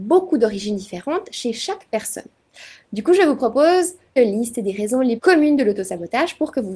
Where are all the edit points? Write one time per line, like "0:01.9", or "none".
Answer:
0:04.2
0:05.2